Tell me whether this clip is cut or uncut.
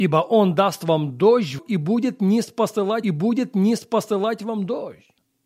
cut